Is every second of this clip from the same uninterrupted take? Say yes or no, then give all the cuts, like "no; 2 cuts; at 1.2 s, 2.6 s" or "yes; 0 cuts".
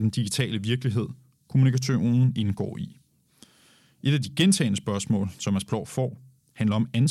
yes; 0 cuts